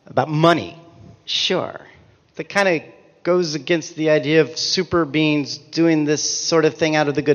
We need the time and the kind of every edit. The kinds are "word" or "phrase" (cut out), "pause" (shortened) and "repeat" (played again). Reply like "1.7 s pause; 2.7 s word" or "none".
none